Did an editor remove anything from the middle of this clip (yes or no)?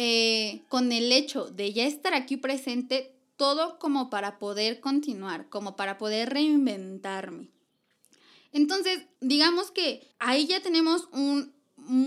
yes